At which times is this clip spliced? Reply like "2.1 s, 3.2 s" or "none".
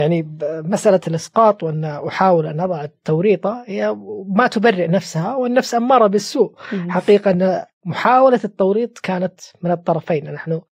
7.7 s